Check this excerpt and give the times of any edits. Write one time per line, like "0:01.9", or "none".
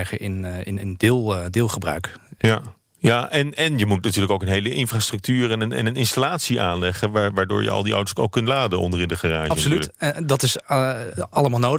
none

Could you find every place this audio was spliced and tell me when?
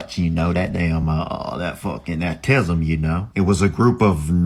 none

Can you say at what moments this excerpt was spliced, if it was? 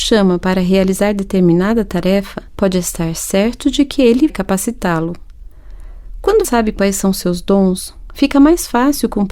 0:02.5
0:04.3
0:06.4

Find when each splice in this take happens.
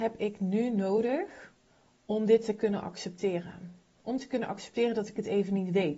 0:01.7

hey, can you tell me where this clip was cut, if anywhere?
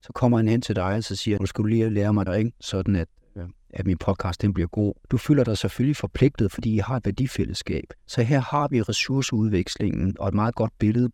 0:01.4
0:02.3
0:05.0
0:08.0

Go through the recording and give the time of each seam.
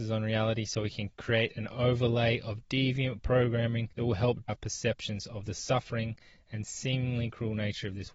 0:03.9
0:04.5

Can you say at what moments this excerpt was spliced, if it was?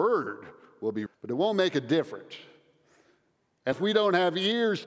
0:01.1
0:03.7

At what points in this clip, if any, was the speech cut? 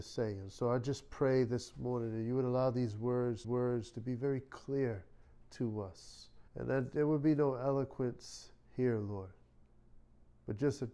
0:03.4
0:06.5

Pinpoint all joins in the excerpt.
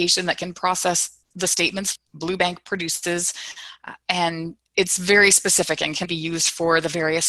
0:02.0
0:04.7
0:06.1

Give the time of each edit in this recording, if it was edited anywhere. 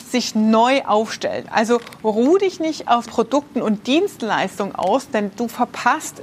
0:03.1

